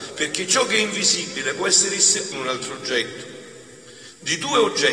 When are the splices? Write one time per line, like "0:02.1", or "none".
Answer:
0:02.3